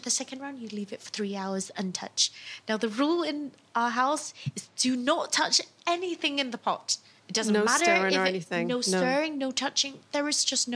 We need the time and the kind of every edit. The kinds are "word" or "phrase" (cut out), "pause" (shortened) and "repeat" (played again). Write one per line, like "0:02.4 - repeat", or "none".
0:07.2 - pause